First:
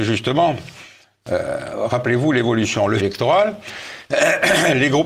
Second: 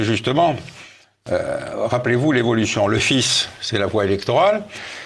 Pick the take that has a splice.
first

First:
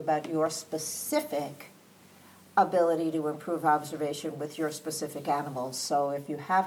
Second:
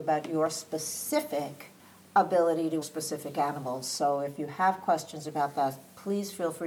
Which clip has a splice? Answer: second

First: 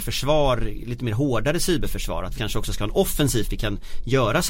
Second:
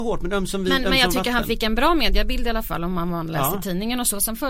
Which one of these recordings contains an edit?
first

